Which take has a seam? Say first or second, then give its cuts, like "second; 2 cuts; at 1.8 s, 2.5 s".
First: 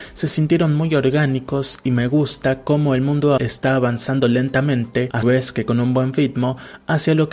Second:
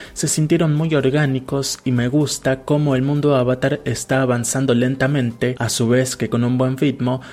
first; 2 cuts; at 3.4 s, 5.2 s